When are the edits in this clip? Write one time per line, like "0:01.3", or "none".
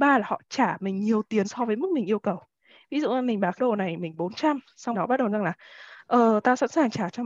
0:01.4
0:03.6
0:04.9
0:05.3